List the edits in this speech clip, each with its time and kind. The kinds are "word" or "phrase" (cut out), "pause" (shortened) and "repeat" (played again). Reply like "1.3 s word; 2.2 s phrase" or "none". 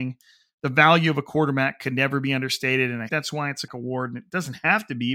3.1 s word; 3.7 s word